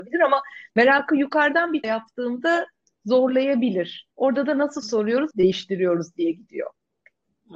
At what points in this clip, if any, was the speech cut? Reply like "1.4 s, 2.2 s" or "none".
1.8 s, 4.1 s, 4.8 s, 5.3 s